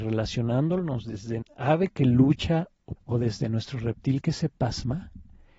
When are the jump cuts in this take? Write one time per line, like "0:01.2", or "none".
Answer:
0:01.4
0:03.0